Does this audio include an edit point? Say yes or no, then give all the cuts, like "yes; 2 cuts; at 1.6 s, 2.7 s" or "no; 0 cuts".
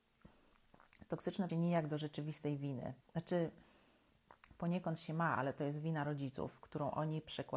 yes; 2 cuts; at 1.5 s, 3.0 s